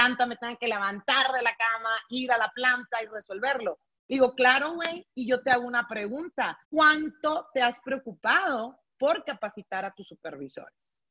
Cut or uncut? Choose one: cut